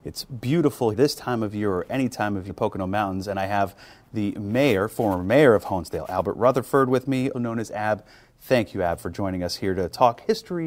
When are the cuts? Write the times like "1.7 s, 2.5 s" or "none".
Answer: 0.9 s, 2.5 s, 7.3 s